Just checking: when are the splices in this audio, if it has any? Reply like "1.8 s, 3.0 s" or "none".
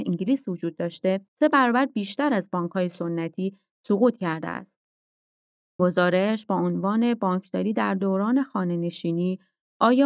1.3 s, 5.8 s